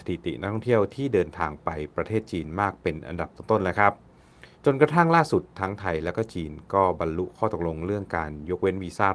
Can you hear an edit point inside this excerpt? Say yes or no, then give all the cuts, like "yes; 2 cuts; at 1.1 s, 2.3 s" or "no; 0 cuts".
yes; 1 cut; at 4.5 s